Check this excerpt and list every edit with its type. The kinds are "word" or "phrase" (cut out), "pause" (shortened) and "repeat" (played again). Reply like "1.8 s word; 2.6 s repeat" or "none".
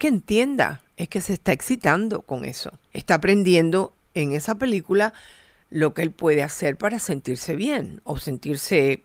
2.8 s pause